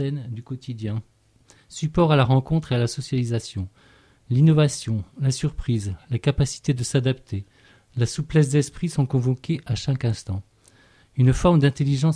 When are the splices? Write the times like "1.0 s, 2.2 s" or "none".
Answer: none